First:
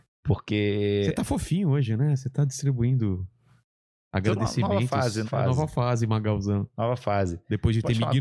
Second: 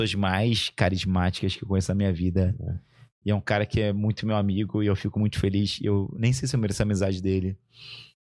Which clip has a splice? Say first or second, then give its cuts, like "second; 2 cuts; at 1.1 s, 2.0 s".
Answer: first; 1 cut; at 5.2 s